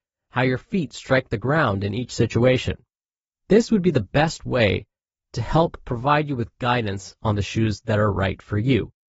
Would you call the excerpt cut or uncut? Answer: uncut